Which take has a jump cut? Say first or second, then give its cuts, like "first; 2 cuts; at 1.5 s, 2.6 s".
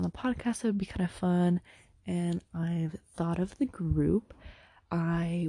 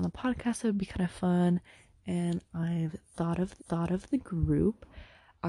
second; 1 cut; at 3.6 s